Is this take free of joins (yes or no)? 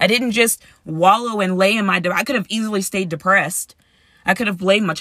yes